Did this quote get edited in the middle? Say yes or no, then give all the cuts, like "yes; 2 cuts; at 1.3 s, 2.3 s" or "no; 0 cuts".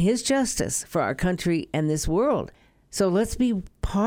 no; 0 cuts